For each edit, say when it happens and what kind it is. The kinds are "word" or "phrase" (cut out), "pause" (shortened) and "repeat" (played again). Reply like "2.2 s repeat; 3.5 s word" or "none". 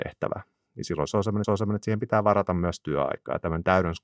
1.4 s repeat